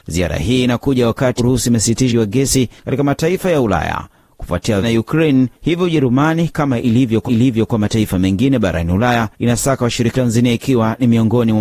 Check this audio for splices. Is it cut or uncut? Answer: cut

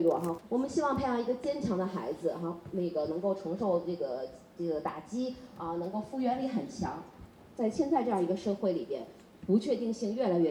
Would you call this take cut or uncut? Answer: uncut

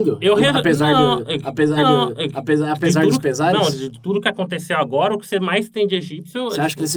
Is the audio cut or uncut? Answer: cut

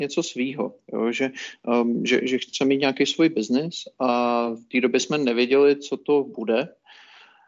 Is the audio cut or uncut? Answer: uncut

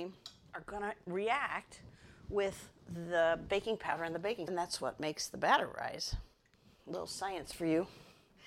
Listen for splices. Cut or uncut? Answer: cut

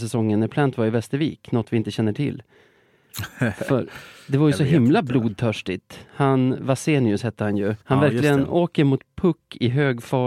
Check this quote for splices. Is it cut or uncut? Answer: cut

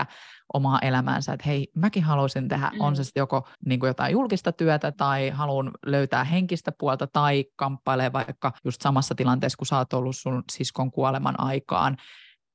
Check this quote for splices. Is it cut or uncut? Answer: cut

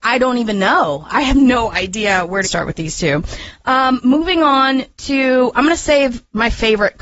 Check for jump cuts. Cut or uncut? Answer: cut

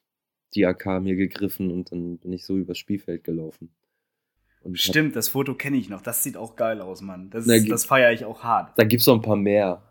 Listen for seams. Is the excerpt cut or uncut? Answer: uncut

